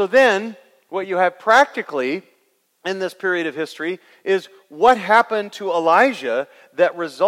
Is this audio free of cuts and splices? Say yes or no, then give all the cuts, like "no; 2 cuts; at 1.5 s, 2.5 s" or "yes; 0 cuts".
yes; 0 cuts